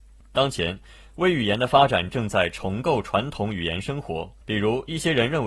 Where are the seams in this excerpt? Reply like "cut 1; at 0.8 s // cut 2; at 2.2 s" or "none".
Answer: cut 1; at 4.4 s